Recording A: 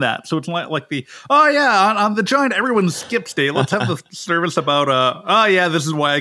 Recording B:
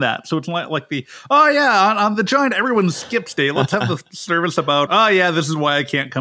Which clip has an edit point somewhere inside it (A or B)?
B